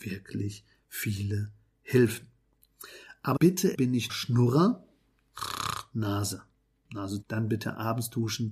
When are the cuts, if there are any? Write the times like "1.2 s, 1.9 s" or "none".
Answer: 3.4 s, 3.7 s, 4.1 s, 7.2 s